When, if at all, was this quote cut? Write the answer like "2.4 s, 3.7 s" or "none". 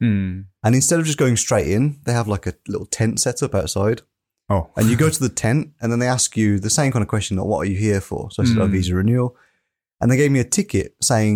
none